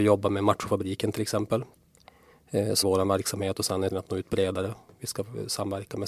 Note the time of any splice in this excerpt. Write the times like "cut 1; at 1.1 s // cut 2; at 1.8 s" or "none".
cut 1; at 2.8 s // cut 2; at 3.9 s